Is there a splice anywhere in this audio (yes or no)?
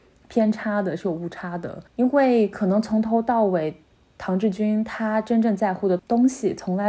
yes